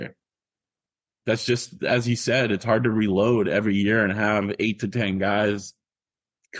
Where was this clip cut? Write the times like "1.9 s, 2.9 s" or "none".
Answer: none

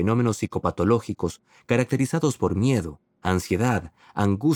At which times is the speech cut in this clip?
none

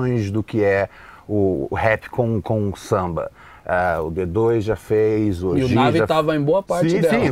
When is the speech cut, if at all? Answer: none

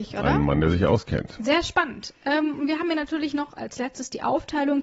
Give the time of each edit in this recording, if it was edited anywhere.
none

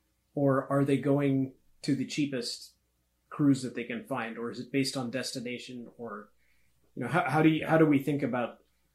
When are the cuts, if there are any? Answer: none

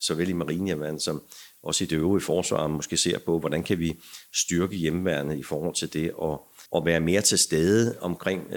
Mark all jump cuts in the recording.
6.7 s

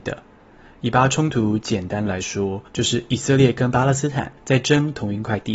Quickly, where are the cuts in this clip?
2.7 s, 4.4 s

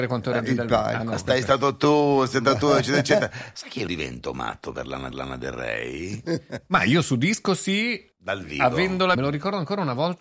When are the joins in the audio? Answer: 3.9 s, 5.1 s, 8.1 s, 9.1 s

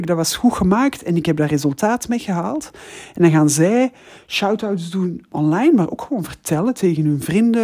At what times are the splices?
none

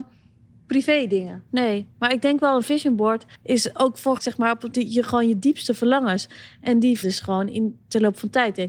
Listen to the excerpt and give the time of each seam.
1.5 s, 3.3 s, 4.2 s, 4.7 s, 7.0 s

